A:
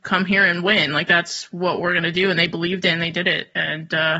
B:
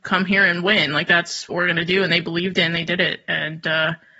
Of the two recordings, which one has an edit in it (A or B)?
B